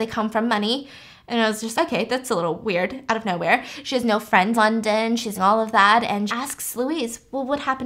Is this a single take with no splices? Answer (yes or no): no